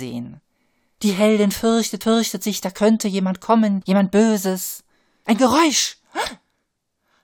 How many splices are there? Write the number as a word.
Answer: one